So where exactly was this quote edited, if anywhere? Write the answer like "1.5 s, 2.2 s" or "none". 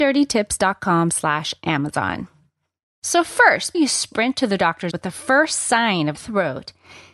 3.7 s, 4.9 s, 6.1 s

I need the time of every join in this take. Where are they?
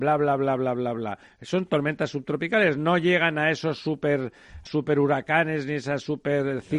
4.7 s

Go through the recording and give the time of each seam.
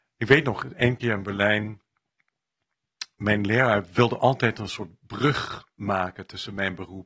none

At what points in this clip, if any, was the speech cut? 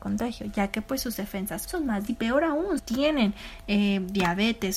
1.6 s, 2.1 s, 2.8 s

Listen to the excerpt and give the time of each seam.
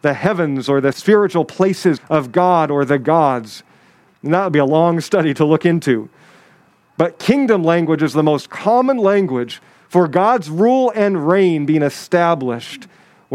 0.9 s, 2.0 s

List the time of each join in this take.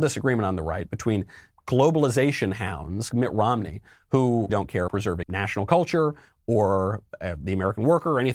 1.5 s, 3.1 s, 4.5 s, 4.9 s, 5.2 s

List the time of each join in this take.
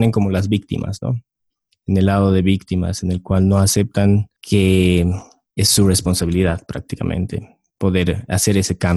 none

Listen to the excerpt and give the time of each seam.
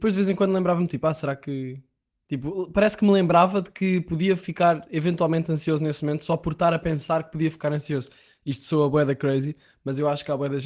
none

